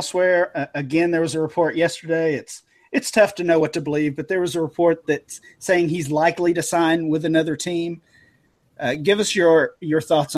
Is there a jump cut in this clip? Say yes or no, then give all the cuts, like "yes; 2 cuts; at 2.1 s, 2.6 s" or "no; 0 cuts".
no; 0 cuts